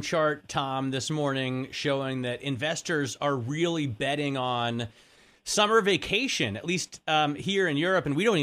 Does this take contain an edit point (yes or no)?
no